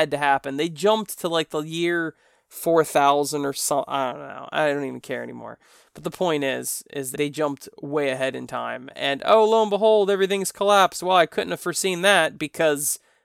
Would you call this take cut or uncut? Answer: cut